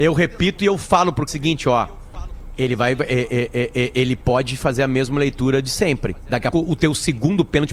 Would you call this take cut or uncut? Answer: cut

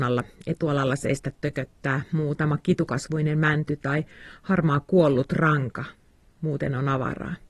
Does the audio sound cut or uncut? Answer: uncut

